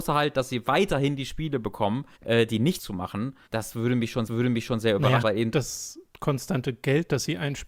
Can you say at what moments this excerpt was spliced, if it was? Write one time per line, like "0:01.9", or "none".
0:02.2
0:02.8
0:03.5
0:04.3
0:05.2